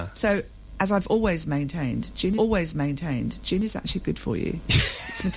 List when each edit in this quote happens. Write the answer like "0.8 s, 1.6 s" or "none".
2.4 s